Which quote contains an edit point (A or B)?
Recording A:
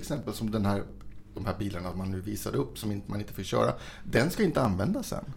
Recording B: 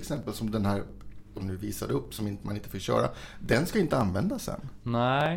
B